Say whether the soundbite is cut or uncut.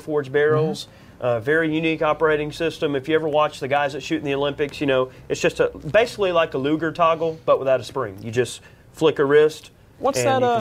uncut